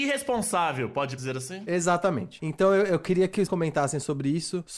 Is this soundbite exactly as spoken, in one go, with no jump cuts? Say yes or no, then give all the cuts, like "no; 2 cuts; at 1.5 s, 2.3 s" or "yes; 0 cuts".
no; 2 cuts; at 1.2 s, 3.5 s